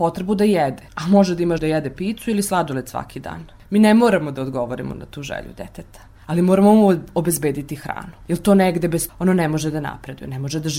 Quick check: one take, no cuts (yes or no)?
no